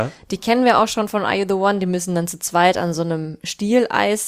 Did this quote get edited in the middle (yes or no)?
no